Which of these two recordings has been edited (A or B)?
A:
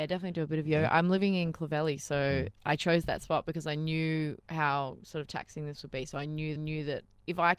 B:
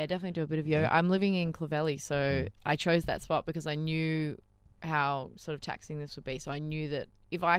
A